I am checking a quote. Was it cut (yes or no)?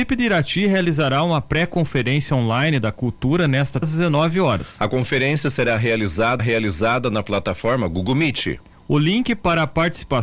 yes